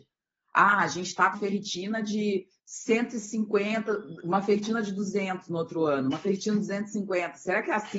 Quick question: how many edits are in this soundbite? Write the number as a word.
two